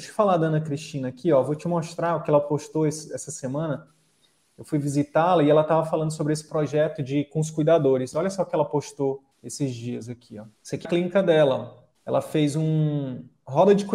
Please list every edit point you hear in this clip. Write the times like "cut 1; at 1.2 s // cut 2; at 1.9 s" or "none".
cut 1; at 9.3 s // cut 2; at 10.5 s // cut 3; at 10.8 s // cut 4; at 11.9 s